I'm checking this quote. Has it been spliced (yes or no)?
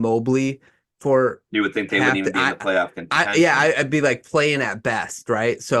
no